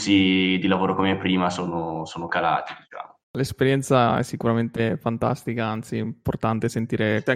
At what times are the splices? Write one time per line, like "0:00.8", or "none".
0:03.2

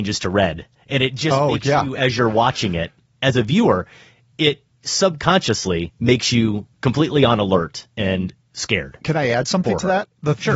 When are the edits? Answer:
0:06.7

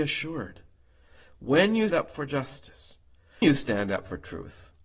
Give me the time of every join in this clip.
0:01.9
0:03.4

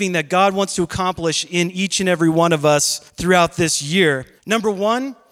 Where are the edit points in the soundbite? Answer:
0:03.1
0:04.4

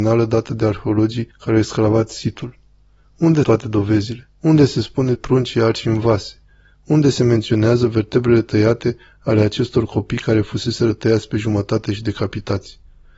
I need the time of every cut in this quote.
0:01.3
0:03.4
0:04.3
0:05.1

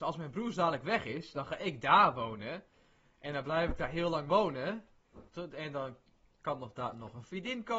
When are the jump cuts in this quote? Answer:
0:05.3

